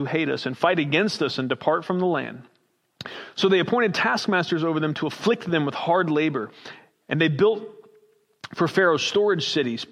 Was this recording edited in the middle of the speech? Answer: no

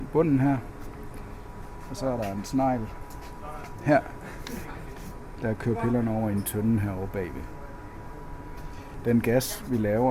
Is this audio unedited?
yes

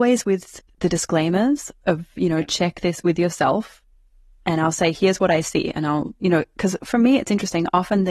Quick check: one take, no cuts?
yes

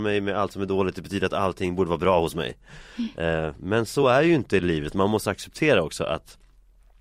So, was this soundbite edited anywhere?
no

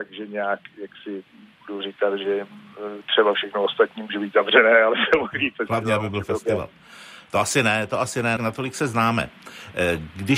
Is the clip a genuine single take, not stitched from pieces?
no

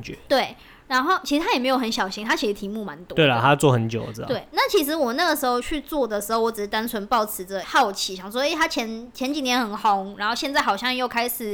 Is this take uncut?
no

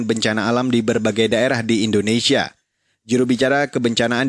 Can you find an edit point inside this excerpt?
no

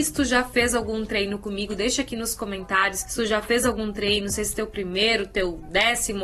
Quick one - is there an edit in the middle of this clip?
no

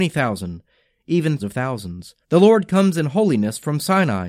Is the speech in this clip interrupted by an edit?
yes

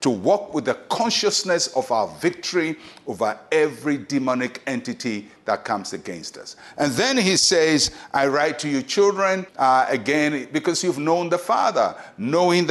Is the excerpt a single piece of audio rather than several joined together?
no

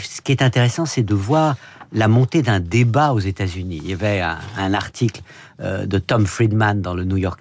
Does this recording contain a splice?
no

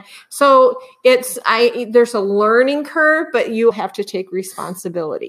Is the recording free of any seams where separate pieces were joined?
no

